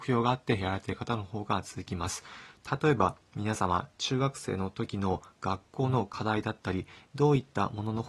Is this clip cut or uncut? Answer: uncut